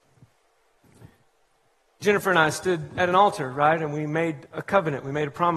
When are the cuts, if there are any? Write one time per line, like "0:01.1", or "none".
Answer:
0:04.5

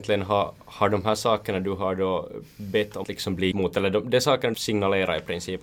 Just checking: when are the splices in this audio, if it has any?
0:03.0
0:03.5
0:04.5

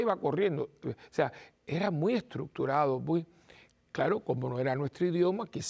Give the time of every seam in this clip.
none

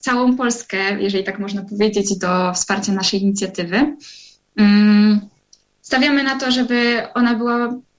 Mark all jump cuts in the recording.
none

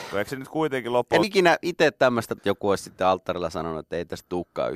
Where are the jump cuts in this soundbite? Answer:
0:01.2
0:02.4

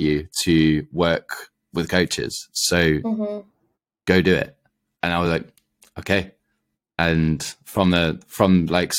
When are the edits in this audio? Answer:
none

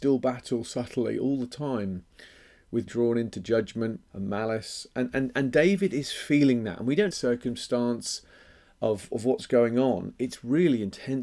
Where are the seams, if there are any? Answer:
0:02.9
0:04.1
0:07.1

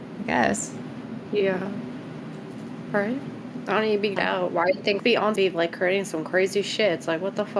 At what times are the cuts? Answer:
0:04.2
0:05.0
0:05.4

